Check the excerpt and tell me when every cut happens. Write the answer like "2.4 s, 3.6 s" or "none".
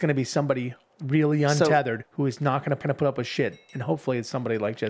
2.0 s, 2.8 s